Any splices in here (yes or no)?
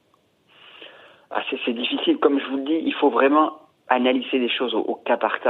no